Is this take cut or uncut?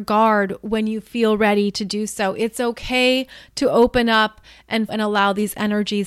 cut